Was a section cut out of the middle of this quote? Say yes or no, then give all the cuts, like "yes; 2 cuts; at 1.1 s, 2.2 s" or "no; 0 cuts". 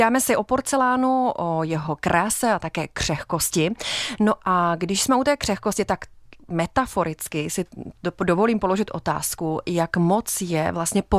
no; 0 cuts